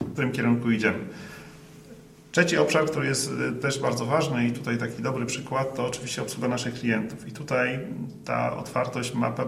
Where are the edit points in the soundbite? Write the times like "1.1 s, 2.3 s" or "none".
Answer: none

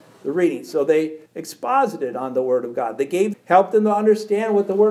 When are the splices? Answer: 1.3 s, 3.3 s

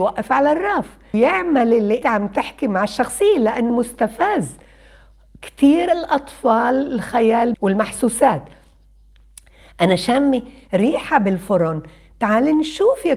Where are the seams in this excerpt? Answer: 1.1 s, 2.0 s, 3.7 s, 7.5 s

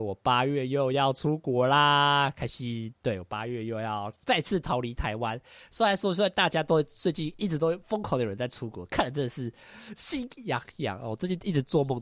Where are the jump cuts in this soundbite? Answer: 4.2 s

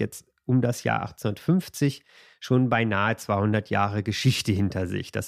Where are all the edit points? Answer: none

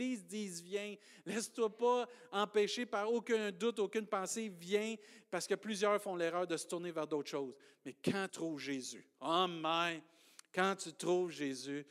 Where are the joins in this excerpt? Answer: 8.3 s

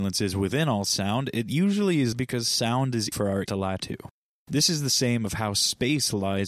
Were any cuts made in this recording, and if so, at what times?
2.1 s, 3.1 s, 3.5 s, 3.8 s

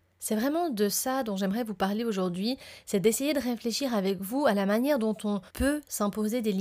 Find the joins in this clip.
5.5 s

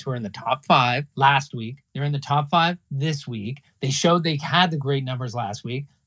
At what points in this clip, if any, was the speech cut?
1.1 s

